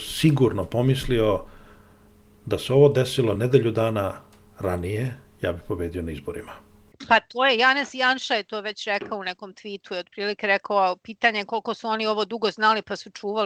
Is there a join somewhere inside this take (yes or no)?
no